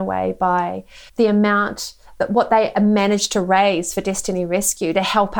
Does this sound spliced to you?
yes; 1 cut; at 1.1 s

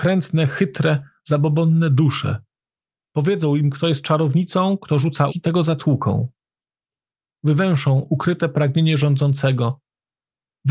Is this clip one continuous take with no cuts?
no; 1 cut; at 5.3 s

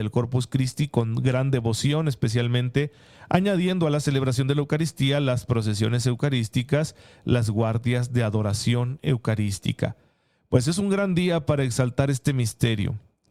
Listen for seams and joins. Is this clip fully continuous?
yes; 0 cuts

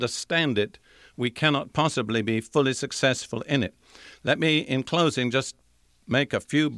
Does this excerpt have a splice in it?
no; 0 cuts

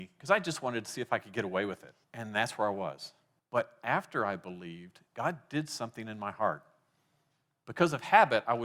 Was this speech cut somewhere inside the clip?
yes; 3 cuts; at 2.0 s, 3.4 s, 5.1 s

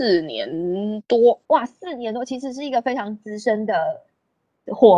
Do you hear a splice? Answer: yes; 1 cut; at 1.4 s

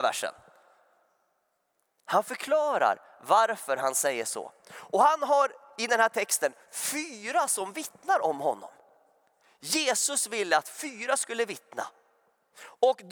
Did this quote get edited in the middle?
no; 0 cuts

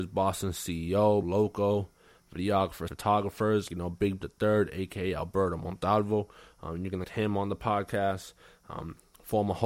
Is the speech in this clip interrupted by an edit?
yes; 5 cuts; at 1.2 s, 2.9 s, 3.7 s, 4.2 s, 7.0 s

